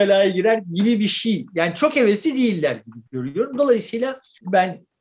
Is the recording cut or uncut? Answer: cut